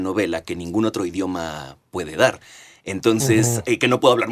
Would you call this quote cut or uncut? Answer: uncut